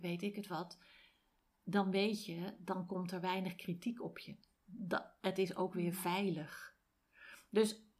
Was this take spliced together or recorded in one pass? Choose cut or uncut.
uncut